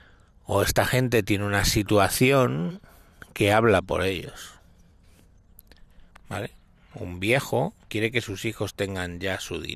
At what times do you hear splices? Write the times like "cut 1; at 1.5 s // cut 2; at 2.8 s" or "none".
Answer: cut 1; at 7.9 s